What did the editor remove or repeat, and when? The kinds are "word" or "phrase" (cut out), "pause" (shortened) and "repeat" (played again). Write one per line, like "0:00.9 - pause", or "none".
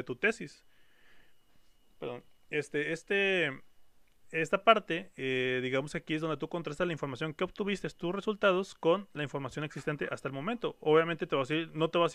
none

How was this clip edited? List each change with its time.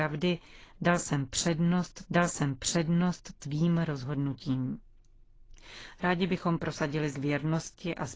0:02.0 - repeat
0:07.1 - word

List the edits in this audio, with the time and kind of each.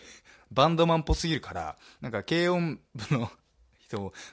none

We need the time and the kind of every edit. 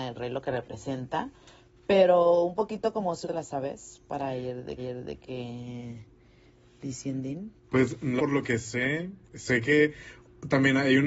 0:03.2 - phrase
0:04.8 - repeat
0:07.6 - pause
0:08.2 - word
0:09.3 - pause

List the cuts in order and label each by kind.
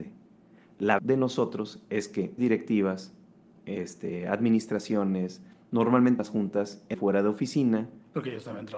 0:01.0 - word
0:02.4 - word
0:06.2 - word
0:06.9 - word

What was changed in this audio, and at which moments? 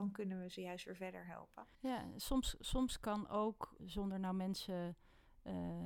0:01.7 - pause
0:03.8 - word

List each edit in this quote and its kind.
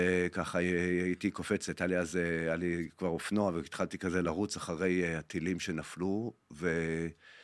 none

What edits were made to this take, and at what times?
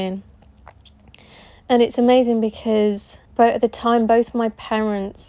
0:03.3 - pause

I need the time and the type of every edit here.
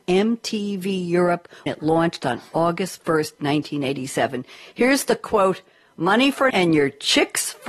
0:01.7 - word
0:06.5 - word

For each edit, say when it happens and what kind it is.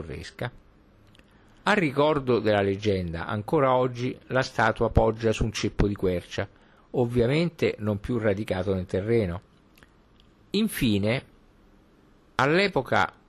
none

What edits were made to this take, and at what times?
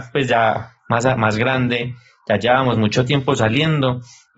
none

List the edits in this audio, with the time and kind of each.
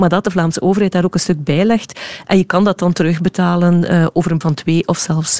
0:04.4 - word

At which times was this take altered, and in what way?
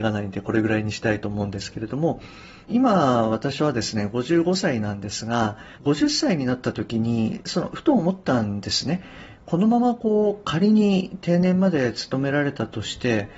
0:02.7 - phrase
0:05.7 - pause

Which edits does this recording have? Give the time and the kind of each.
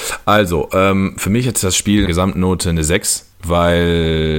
0:02.1 - word
0:03.3 - pause

